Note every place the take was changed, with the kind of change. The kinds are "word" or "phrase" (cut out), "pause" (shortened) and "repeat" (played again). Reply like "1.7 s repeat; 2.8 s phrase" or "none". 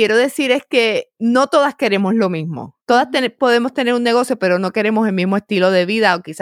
2.8 s pause